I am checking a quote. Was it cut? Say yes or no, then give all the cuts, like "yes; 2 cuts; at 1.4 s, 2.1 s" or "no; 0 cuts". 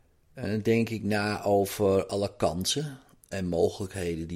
no; 0 cuts